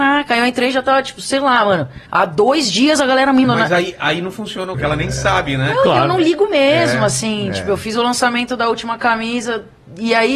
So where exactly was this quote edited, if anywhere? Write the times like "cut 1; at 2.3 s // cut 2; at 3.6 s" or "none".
cut 1; at 2.1 s // cut 2; at 3.4 s // cut 3; at 4.7 s